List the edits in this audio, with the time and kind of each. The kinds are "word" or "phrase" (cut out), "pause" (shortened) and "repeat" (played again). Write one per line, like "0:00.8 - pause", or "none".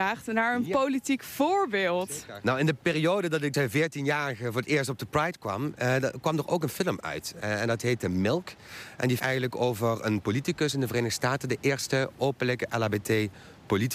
0:03.5 - phrase
0:09.2 - phrase